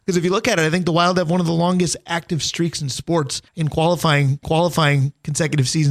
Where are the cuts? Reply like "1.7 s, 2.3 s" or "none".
3.5 s, 4.4 s